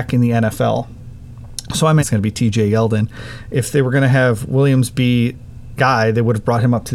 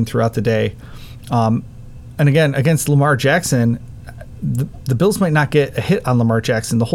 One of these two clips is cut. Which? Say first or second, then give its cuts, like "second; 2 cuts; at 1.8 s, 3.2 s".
first; 2 cuts; at 2.0 s, 5.8 s